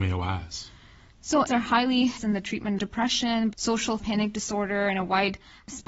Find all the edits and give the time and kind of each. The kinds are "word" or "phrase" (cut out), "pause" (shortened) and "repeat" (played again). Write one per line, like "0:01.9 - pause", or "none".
0:01.5 - word
0:02.2 - word
0:02.8 - word
0:03.5 - word
0:04.0 - word